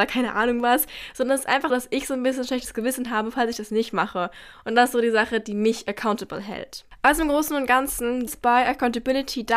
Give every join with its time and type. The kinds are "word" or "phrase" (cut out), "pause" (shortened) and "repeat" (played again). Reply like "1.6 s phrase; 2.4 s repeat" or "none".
1.7 s word; 8.3 s word